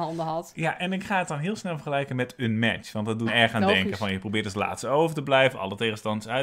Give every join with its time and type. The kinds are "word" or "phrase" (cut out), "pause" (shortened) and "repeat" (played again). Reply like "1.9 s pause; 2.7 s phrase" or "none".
3.3 s word